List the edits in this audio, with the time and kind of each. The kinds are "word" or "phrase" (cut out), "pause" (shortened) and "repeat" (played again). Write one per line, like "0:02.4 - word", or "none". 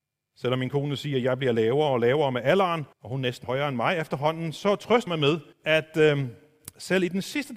0:02.9 - pause
0:03.4 - word
0:05.1 - word
0:05.5 - pause